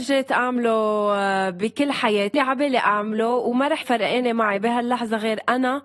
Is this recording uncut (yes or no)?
no